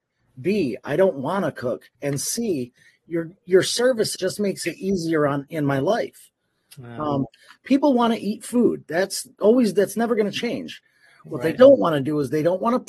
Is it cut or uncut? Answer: cut